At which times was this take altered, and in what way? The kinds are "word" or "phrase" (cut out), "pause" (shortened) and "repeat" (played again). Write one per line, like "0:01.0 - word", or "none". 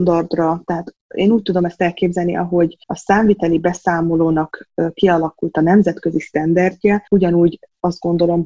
0:02.8 - pause
0:07.1 - pause